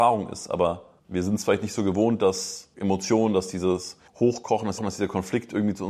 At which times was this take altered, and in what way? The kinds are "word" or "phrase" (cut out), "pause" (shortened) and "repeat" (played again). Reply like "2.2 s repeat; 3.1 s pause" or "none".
1.0 s pause; 4.1 s pause; 4.8 s repeat